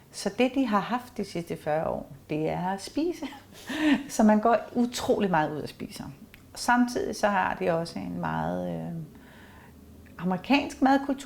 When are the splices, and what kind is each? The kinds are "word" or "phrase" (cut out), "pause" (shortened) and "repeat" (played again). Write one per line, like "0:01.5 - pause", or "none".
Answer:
none